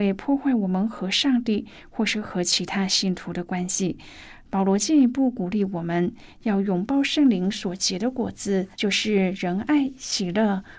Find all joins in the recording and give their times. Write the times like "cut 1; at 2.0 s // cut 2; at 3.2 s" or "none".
cut 1; at 8.7 s